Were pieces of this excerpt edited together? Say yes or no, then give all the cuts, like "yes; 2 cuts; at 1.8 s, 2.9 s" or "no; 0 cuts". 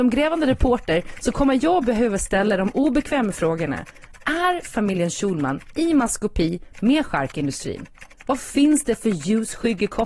no; 0 cuts